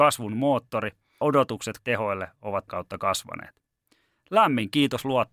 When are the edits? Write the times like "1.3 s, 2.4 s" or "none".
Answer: 1.2 s, 1.8 s, 2.7 s